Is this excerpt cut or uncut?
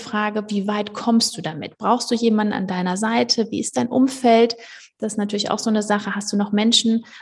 uncut